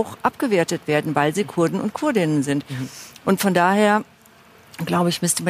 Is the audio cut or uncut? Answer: uncut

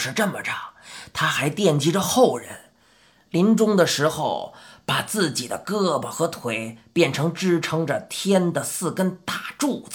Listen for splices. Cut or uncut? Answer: uncut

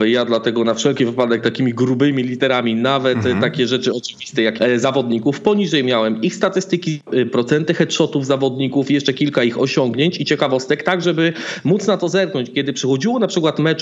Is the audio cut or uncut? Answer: cut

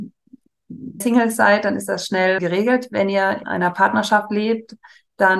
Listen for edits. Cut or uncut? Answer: cut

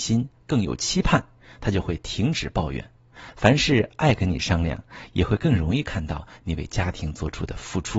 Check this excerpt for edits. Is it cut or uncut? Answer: uncut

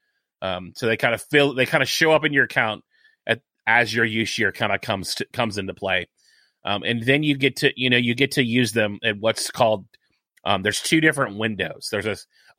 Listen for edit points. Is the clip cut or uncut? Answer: uncut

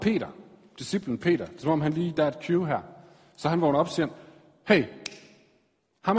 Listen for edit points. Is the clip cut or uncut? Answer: uncut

